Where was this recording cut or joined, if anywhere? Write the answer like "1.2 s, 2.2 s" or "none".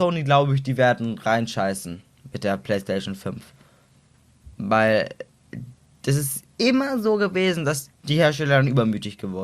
4.5 s, 8.0 s